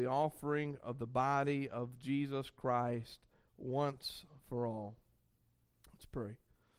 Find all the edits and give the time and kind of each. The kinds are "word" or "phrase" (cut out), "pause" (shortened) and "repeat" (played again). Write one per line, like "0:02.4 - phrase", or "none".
none